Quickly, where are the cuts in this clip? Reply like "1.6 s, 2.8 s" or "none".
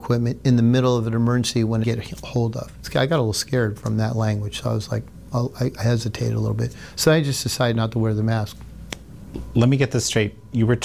1.8 s